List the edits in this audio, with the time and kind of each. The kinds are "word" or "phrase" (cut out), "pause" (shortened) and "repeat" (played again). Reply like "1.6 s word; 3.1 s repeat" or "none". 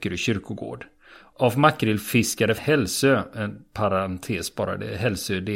2.6 s word